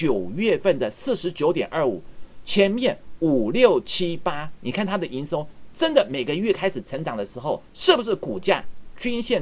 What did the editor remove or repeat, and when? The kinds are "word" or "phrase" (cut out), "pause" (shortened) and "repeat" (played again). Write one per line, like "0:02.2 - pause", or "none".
0:07.7 - pause